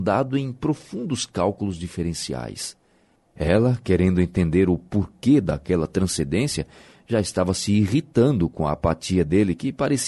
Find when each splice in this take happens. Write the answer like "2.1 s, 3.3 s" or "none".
none